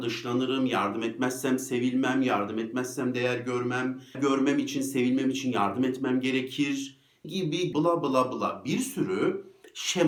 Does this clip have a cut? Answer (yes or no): yes